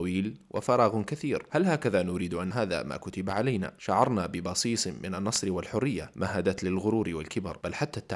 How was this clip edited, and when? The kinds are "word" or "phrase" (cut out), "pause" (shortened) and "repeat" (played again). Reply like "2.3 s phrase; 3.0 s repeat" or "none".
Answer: 2.5 s phrase